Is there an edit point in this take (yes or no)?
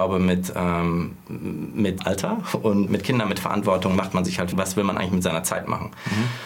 yes